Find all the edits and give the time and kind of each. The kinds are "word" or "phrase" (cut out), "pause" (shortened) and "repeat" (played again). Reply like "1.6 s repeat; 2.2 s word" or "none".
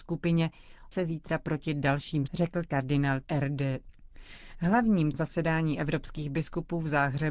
0.9 s word; 2.3 s word; 3.2 s word; 5.1 s word